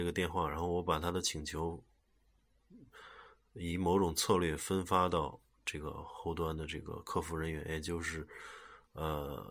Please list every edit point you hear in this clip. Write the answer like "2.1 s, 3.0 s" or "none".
none